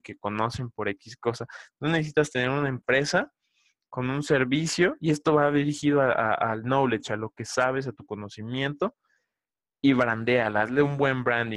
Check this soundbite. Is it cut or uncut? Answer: uncut